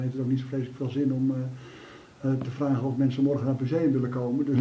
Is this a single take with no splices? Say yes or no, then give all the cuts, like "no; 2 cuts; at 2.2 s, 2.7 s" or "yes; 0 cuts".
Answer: yes; 0 cuts